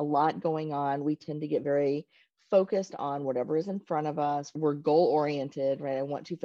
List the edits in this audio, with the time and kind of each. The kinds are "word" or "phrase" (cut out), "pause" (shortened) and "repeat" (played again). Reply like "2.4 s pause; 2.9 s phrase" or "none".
none